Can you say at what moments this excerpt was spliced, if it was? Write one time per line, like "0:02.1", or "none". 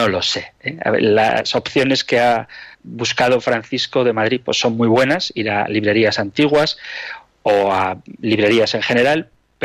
0:02.7